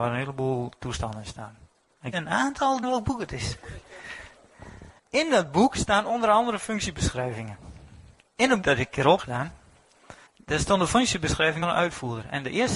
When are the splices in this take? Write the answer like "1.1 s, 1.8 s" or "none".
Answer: 2.1 s, 2.8 s, 5.0 s, 8.2 s, 8.6 s, 9.2 s, 10.3 s, 11.6 s

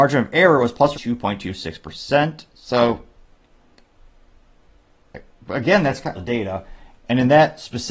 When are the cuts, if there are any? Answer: 0.9 s, 2.5 s, 6.1 s

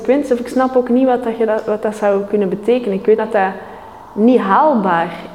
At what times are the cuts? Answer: 3.2 s

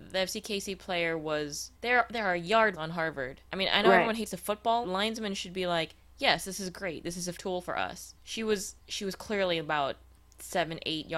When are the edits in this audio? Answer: 1.7 s, 2.7 s, 3.5 s, 4.8 s, 7.3 s, 8.2 s, 8.8 s

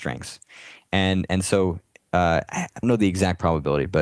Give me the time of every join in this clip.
2.8 s

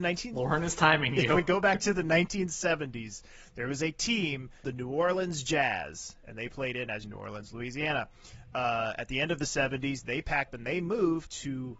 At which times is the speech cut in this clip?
4.6 s, 7.0 s, 10.5 s

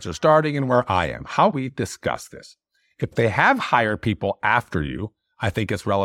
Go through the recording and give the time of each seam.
1.5 s, 3.1 s

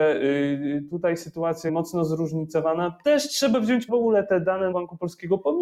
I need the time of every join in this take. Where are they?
1.7 s, 3.9 s, 4.7 s

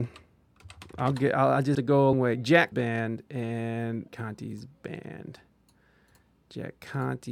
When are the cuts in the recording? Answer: 1.7 s, 2.1 s, 2.7 s, 4.1 s

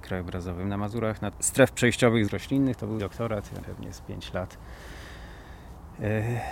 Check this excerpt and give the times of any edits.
1.3 s, 2.3 s, 3.0 s, 3.6 s

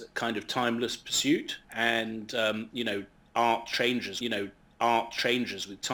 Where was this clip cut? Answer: 1.6 s, 4.2 s

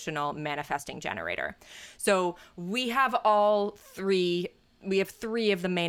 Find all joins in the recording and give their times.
none

